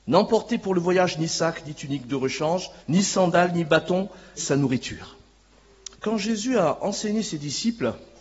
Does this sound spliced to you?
yes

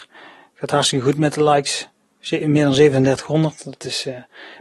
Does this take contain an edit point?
no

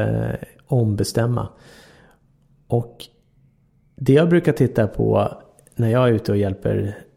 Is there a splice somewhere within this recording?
no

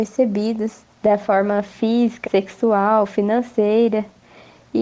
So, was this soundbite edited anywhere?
yes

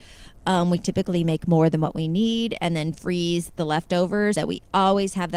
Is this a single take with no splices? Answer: no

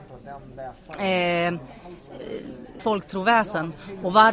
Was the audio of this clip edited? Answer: yes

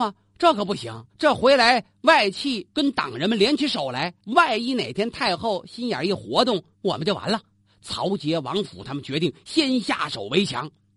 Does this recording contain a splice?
yes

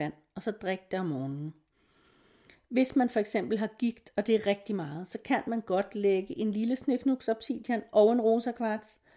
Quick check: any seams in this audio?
no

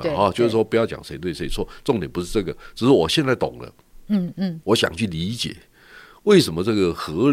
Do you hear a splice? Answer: no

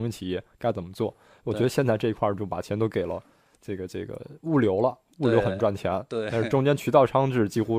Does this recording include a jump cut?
no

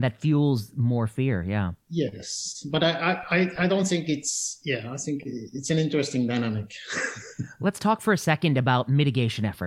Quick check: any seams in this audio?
yes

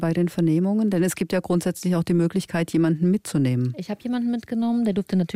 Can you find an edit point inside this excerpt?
no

